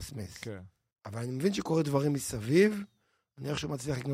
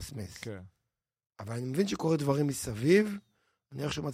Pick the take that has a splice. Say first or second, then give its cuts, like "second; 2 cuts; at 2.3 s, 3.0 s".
first; 1 cut; at 0.9 s